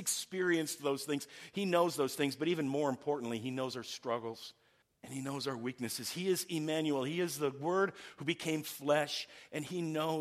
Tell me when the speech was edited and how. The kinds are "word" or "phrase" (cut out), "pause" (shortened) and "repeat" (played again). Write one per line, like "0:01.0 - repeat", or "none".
0:04.8 - pause